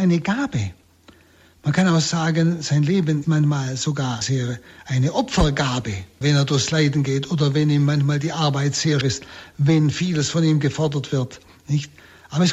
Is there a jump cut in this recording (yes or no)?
yes